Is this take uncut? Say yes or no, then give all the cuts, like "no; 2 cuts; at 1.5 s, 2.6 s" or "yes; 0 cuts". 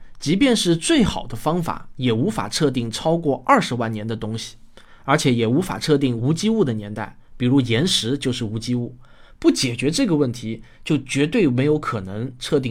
yes; 0 cuts